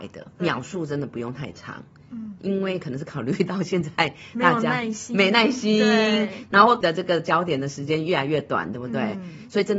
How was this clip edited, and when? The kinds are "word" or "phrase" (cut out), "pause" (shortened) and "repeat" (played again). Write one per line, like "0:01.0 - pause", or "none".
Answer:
0:06.8 - word